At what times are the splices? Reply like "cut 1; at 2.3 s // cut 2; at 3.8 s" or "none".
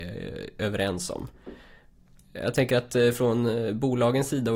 none